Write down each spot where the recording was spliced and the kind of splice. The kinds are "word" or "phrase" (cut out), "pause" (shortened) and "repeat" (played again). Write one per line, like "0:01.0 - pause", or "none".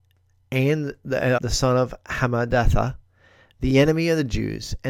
0:01.4 - word